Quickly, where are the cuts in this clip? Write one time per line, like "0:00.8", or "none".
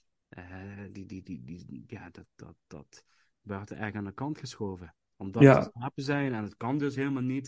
none